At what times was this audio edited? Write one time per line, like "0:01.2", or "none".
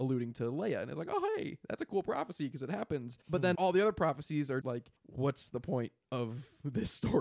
0:03.2
0:03.5
0:04.6
0:05.0